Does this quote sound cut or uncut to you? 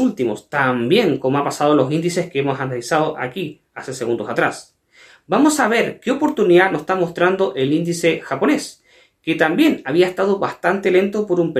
uncut